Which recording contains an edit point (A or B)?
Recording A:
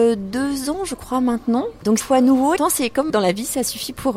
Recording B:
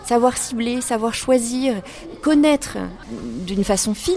A